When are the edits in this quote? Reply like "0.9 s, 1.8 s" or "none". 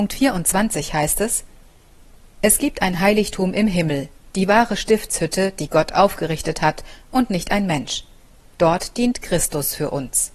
none